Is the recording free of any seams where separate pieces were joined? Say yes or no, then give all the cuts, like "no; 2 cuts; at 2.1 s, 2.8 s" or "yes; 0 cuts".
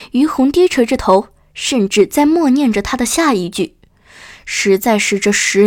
yes; 0 cuts